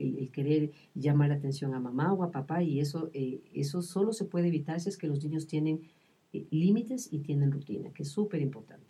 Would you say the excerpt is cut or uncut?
uncut